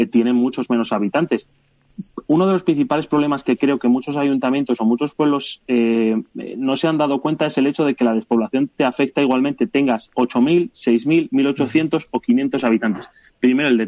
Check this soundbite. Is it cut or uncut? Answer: uncut